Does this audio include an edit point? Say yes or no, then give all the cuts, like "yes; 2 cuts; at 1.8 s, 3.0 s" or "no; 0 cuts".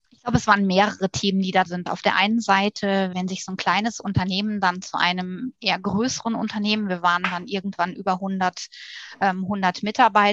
yes; 2 cuts; at 1.7 s, 3.1 s